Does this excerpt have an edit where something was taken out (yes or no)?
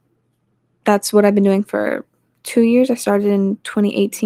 no